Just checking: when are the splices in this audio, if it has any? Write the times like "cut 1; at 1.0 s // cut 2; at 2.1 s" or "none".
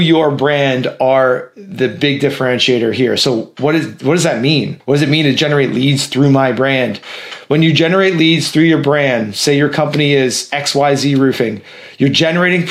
cut 1; at 4.8 s